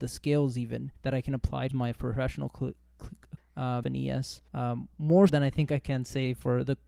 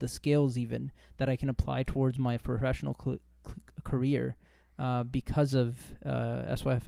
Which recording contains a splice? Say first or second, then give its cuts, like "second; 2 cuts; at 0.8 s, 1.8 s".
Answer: first; 6 cuts; at 1.0 s, 1.7 s, 3.4 s, 3.8 s, 4.5 s, 5.3 s